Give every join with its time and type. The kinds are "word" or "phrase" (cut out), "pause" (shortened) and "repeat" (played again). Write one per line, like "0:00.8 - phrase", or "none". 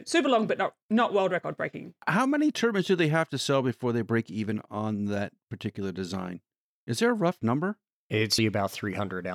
0:08.4 - word